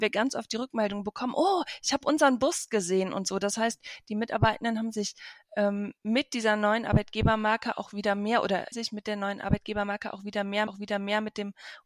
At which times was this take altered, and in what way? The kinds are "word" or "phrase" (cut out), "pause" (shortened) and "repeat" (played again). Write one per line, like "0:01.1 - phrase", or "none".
0:06.0 - pause
0:08.7 - word
0:10.7 - repeat

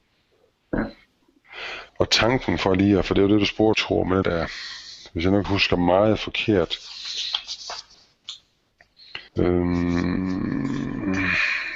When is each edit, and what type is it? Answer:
0:01.9 - pause
0:03.7 - word
0:04.2 - word
0:05.4 - word
0:09.3 - pause

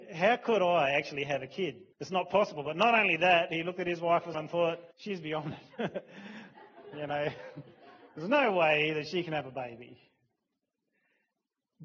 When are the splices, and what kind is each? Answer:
0:01.9 - pause
0:04.3 - word
0:04.9 - pause

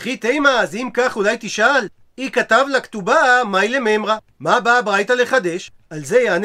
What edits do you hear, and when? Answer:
none

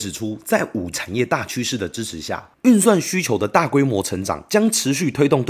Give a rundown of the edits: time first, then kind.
0:00.9 - word

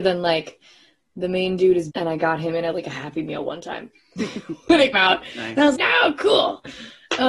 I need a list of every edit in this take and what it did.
0:01.9 - word
0:04.9 - word
0:05.7 - word

